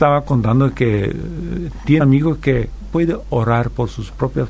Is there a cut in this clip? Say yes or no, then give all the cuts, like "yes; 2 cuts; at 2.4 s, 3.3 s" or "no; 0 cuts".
yes; 2 cuts; at 2.0 s, 2.8 s